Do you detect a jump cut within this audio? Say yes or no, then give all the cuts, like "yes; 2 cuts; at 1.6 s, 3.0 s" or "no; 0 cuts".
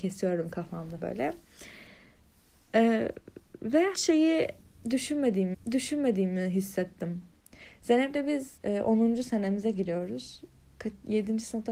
yes; 4 cuts; at 1.0 s, 3.9 s, 5.5 s, 8.6 s